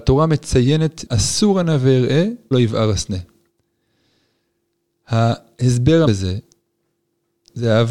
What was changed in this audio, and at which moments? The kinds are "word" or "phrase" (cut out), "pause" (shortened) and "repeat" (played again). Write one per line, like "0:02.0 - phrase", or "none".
0:01.1 - word
0:02.5 - word
0:06.0 - word